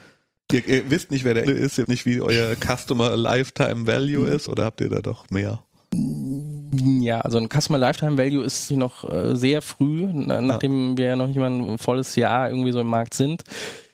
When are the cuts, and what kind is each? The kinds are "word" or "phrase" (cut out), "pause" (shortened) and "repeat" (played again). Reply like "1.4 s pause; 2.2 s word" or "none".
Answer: 1.5 s word; 1.8 s word; 4.5 s word; 8.7 s word